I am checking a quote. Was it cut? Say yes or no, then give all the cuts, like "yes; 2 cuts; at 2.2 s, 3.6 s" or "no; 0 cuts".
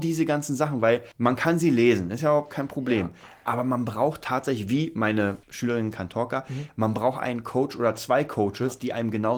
yes; 2 cuts; at 1.1 s, 5.4 s